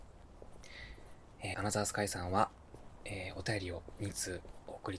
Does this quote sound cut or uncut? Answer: cut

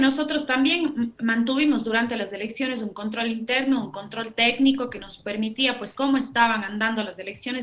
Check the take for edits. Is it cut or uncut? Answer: cut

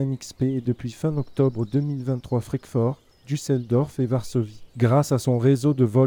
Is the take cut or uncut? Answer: cut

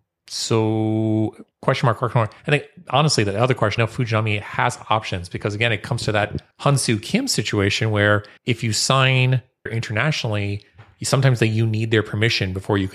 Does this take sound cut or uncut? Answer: cut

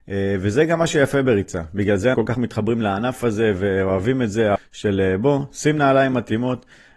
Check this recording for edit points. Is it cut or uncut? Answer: cut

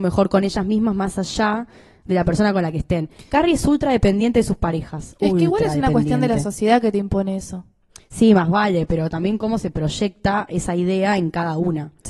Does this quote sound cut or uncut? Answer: uncut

